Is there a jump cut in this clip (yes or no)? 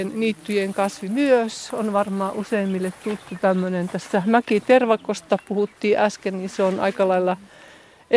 no